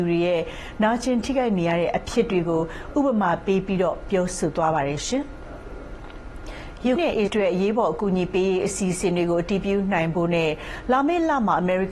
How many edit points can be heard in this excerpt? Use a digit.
2